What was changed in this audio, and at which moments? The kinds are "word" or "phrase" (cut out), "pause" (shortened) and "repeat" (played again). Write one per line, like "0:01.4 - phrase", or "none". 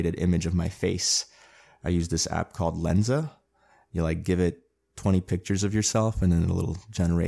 none